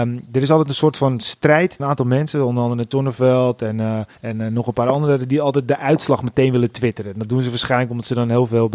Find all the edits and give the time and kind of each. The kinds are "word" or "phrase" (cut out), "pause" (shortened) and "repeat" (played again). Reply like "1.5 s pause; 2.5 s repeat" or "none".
1.8 s word; 2.9 s word; 4.1 s pause